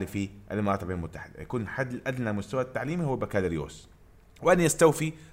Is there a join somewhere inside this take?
yes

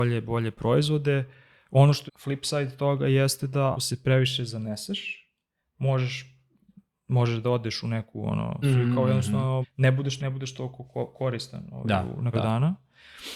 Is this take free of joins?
no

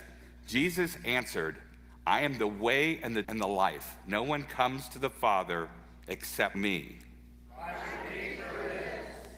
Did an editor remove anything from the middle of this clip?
yes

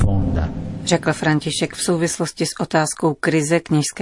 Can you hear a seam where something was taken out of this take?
no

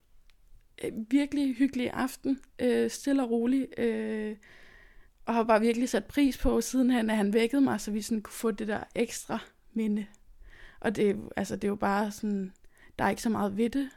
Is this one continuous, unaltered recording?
no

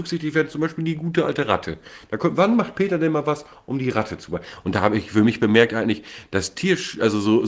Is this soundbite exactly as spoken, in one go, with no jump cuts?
yes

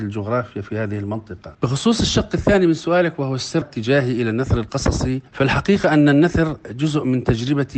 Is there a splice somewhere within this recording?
yes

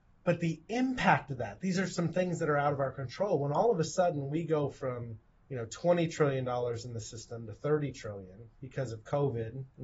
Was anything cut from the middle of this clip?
no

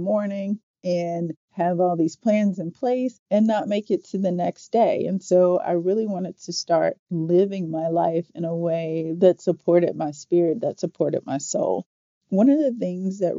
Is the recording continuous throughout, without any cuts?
yes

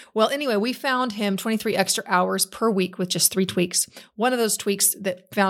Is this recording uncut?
yes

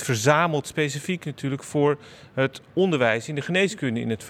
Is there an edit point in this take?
no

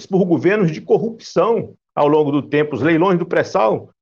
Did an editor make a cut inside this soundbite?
no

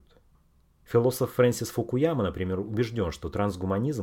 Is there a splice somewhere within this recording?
no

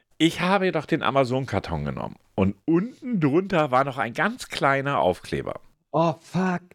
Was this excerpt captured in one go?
no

